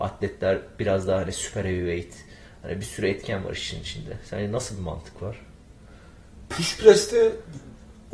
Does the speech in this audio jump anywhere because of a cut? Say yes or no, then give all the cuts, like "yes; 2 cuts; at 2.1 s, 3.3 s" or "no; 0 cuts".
no; 0 cuts